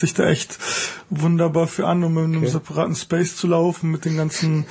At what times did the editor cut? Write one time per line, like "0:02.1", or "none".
none